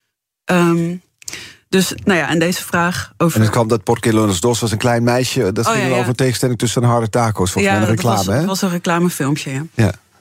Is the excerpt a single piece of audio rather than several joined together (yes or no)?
no